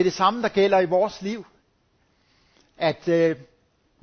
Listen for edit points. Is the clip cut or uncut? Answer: uncut